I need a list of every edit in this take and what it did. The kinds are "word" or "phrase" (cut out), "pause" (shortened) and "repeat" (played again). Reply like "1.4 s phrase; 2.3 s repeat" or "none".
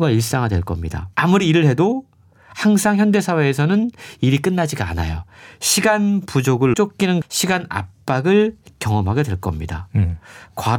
1.1 s pause; 6.7 s phrase; 7.2 s word